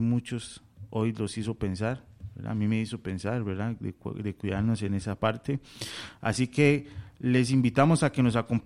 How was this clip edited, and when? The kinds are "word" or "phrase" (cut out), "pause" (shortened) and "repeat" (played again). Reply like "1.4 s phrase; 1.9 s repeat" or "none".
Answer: none